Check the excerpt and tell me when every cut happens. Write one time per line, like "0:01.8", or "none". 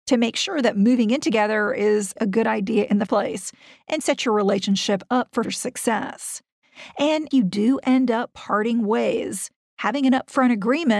0:02.2
0:03.1
0:04.0
0:05.4
0:07.3